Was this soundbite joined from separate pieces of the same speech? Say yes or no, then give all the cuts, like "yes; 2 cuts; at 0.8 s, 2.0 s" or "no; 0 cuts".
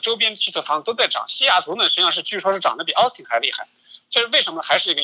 no; 0 cuts